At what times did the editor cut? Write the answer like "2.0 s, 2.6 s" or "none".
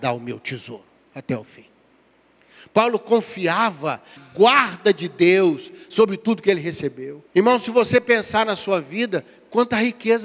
4.2 s, 7.3 s